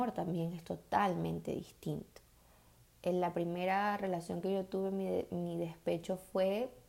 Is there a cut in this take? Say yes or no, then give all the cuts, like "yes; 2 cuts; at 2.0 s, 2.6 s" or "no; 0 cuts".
no; 0 cuts